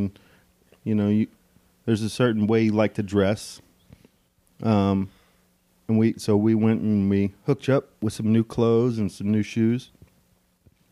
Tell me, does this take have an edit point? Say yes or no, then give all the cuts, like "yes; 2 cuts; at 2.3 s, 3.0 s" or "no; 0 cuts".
no; 0 cuts